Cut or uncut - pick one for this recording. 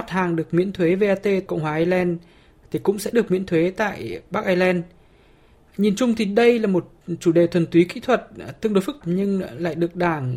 cut